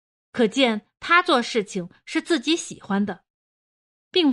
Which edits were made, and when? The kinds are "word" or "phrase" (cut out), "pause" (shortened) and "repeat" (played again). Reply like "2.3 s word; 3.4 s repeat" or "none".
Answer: none

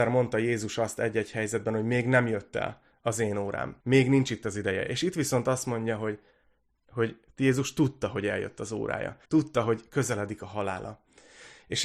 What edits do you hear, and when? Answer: 3.8 s pause; 9.2 s pause

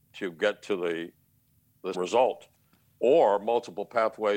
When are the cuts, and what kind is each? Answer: 1.9 s word

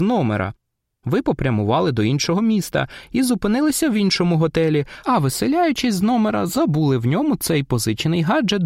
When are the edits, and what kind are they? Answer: none

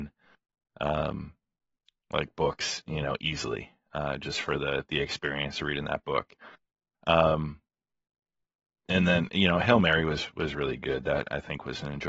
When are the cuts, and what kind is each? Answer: none

